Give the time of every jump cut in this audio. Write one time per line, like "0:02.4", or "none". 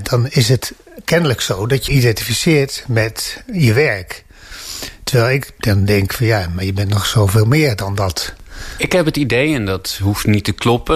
0:01.9